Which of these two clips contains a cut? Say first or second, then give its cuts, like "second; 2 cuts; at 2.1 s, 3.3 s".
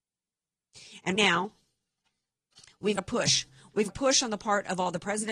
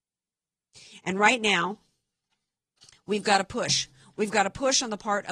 first; 3 cuts; at 1.1 s, 3.0 s, 3.9 s